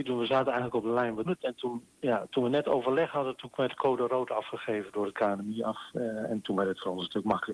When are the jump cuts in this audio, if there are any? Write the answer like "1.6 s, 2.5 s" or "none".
1.3 s